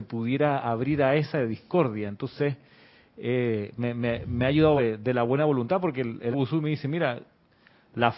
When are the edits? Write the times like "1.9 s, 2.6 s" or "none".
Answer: 4.8 s, 6.3 s